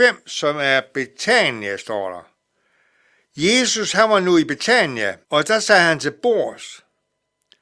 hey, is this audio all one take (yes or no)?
no